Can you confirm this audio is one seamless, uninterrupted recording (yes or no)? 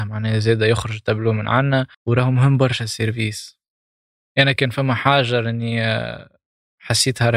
no